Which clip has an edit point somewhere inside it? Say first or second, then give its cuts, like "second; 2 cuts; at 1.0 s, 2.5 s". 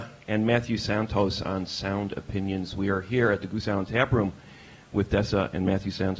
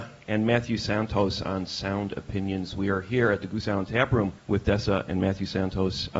second; 1 cut; at 4.4 s